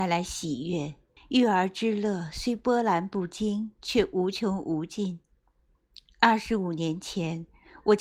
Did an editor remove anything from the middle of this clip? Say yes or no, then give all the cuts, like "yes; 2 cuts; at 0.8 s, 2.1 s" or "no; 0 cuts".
yes; 1 cut; at 1.2 s